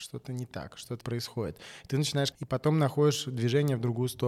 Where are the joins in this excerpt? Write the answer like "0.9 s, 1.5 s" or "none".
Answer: 1.0 s, 2.3 s